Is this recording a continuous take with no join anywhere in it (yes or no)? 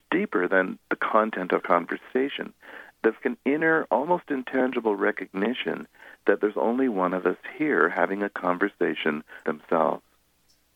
no